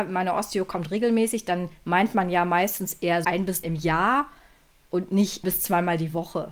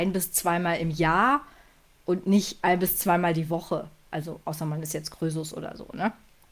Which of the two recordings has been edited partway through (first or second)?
first